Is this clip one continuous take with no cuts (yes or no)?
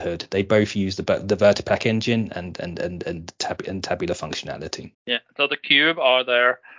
no